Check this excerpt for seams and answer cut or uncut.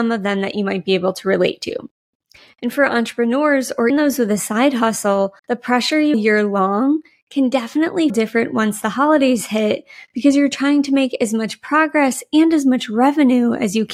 cut